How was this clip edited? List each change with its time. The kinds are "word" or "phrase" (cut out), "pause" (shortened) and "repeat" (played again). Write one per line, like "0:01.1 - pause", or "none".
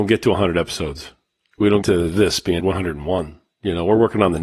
0:01.8 - word
0:02.6 - word